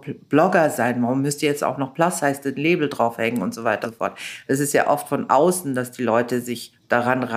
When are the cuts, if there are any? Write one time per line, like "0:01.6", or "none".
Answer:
0:03.8